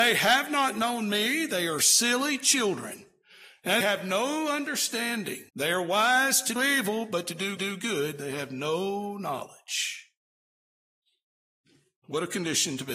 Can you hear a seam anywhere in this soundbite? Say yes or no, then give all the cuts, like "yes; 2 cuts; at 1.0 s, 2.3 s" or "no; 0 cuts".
yes; 4 cuts; at 3.8 s, 5.5 s, 6.6 s, 7.6 s